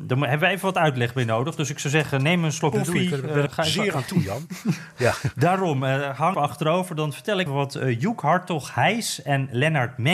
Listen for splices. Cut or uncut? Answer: cut